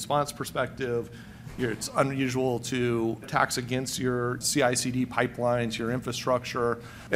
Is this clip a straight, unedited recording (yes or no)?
no